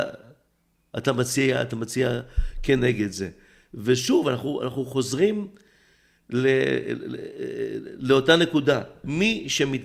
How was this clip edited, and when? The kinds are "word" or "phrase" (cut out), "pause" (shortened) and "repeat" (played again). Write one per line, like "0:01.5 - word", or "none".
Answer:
none